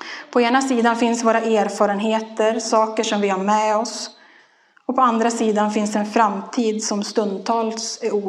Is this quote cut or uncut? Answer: uncut